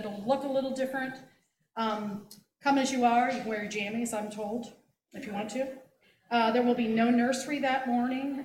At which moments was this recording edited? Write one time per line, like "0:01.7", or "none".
none